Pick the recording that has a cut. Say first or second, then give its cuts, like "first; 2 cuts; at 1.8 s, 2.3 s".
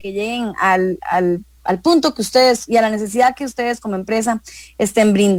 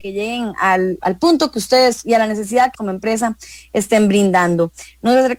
second; 2 cuts; at 1.0 s, 2.7 s